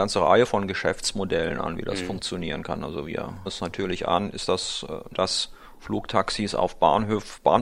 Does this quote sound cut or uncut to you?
cut